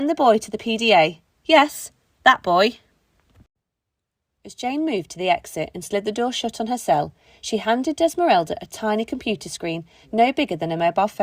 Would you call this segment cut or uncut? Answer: uncut